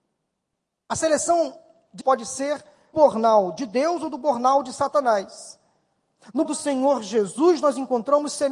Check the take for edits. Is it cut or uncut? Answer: cut